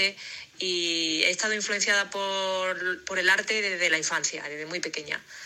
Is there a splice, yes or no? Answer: no